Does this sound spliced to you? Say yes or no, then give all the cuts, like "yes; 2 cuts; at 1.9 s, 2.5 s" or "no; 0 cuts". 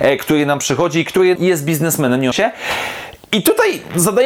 yes; 2 cuts; at 1.4 s, 2.3 s